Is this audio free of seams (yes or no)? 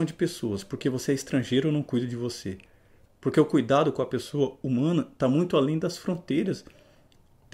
yes